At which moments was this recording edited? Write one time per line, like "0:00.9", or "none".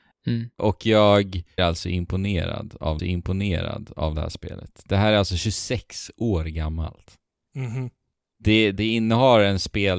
0:01.6
0:03.0
0:08.7